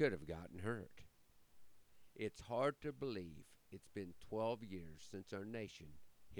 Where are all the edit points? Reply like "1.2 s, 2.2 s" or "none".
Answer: none